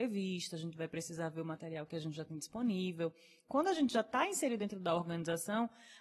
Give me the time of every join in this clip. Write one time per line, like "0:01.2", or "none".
none